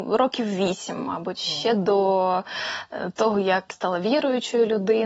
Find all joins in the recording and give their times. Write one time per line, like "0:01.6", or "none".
0:03.7